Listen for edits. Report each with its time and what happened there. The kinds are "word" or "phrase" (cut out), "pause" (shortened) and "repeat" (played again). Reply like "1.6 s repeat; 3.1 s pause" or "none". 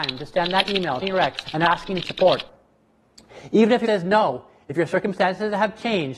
1.0 s word; 1.4 s word; 2.0 s word; 3.8 s word

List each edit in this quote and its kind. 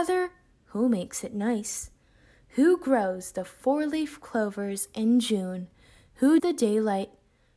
6.4 s word

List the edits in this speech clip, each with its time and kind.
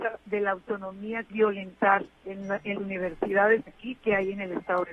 1.3 s phrase; 2.1 s pause; 2.7 s word; 3.7 s word

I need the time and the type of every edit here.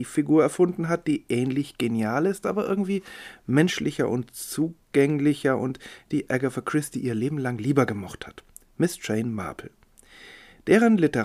none

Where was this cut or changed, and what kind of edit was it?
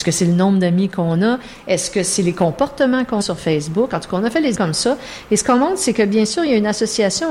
3.2 s word; 4.5 s word

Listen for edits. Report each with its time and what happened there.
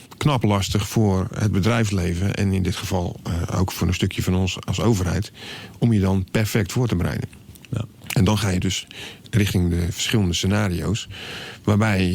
none

